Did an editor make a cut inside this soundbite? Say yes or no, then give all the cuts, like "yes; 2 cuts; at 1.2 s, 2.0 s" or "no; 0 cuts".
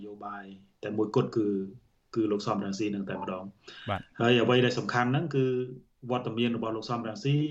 no; 0 cuts